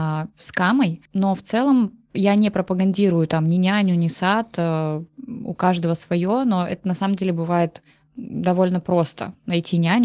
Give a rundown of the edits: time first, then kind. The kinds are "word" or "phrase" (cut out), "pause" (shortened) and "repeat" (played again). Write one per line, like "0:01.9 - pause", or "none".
0:01.1 - pause
0:07.9 - pause